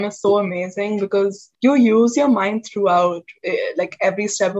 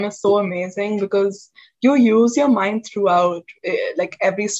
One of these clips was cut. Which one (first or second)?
first